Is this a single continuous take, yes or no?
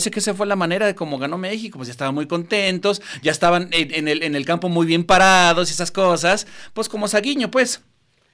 yes